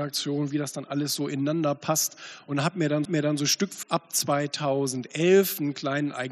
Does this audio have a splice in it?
yes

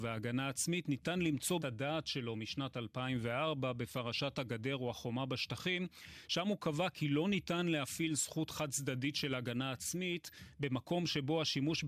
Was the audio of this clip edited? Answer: yes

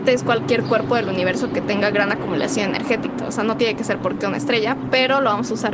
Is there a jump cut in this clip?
no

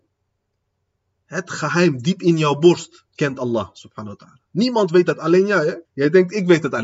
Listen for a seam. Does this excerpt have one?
yes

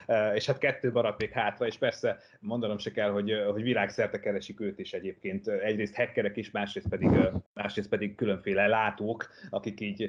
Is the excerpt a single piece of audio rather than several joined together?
no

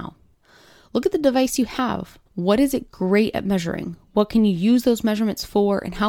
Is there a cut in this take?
yes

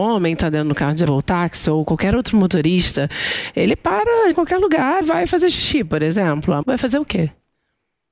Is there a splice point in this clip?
yes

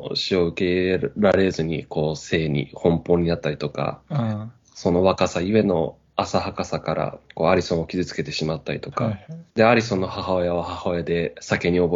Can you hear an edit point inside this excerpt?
yes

